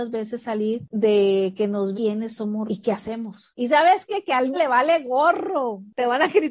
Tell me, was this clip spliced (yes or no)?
yes